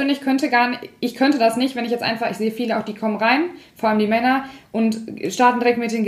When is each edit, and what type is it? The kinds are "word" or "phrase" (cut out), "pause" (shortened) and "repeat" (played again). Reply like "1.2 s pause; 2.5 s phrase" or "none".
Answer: none